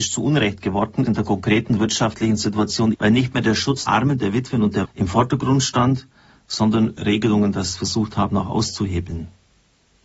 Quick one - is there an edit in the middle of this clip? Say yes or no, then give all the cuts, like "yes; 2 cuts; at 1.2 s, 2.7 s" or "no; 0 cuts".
yes; 5 cuts; at 1.1 s, 2.9 s, 3.9 s, 4.8 s, 7.0 s